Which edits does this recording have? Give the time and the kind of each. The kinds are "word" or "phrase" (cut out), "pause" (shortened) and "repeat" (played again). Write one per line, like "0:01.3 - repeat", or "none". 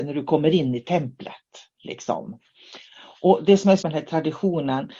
0:03.8 - word